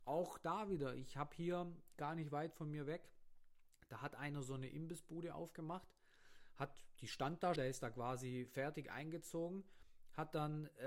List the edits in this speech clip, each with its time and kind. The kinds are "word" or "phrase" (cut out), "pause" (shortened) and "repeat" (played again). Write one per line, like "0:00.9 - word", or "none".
0:07.6 - word